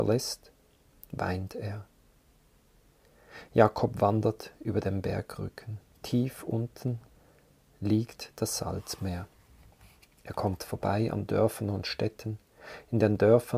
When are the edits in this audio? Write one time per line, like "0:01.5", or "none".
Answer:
none